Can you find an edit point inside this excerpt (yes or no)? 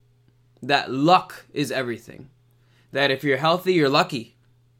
no